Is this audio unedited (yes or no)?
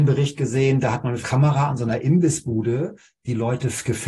no